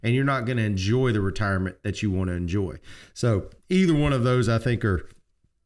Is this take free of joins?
no; 1 cut; at 3.6 s

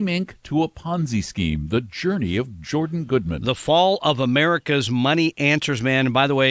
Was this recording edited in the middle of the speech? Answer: no; 0 cuts

